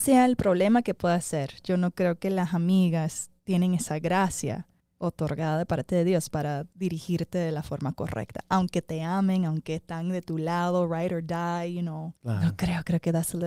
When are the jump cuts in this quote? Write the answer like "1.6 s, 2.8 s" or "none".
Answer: 3.4 s, 4.8 s, 6.7 s, 12.2 s